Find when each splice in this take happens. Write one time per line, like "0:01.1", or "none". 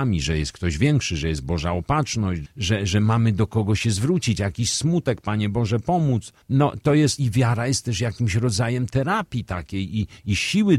0:02.4
0:04.4
0:06.4
0:07.2